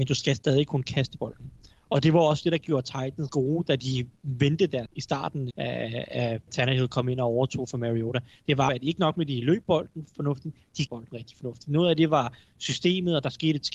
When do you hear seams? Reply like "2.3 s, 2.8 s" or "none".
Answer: 3.3 s, 4.9 s, 5.5 s, 6.5 s, 8.7 s, 10.9 s

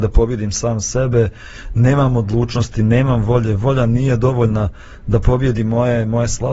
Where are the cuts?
none

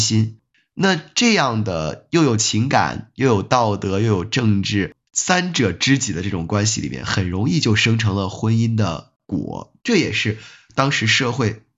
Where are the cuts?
5.1 s, 9.8 s

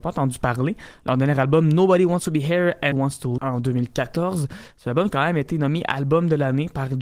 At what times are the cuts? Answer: 2.9 s, 3.4 s, 5.1 s

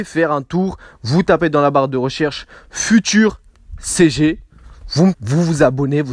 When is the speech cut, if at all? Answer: 5.1 s

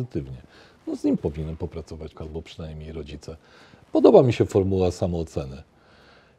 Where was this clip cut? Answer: 1.2 s, 2.1 s

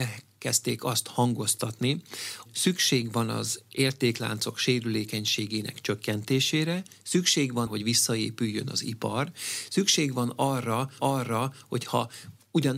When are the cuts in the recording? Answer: 2.5 s, 7.7 s, 11.0 s

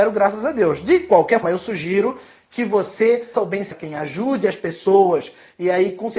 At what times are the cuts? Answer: 1.4 s, 3.3 s, 3.7 s

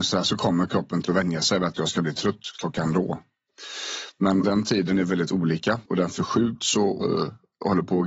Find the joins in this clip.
1.0 s, 4.4 s, 5.9 s, 7.0 s

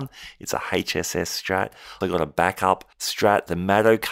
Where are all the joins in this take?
2.0 s, 2.9 s

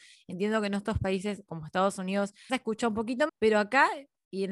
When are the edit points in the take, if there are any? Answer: 1.5 s, 2.5 s, 3.3 s

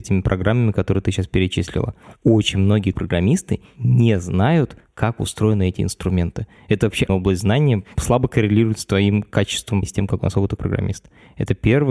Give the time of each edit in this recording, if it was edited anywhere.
2.9 s, 7.1 s, 7.9 s, 9.8 s, 10.6 s

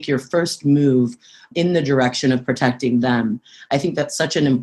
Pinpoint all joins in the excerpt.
none

